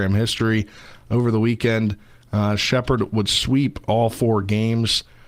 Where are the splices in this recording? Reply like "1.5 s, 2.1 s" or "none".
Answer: none